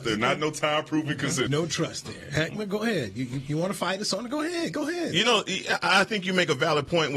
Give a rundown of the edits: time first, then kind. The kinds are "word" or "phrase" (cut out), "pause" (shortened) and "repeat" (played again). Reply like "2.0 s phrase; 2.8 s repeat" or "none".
1.5 s word